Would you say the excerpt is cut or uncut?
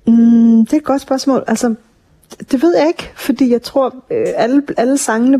uncut